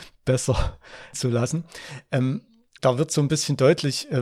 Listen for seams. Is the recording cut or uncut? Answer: cut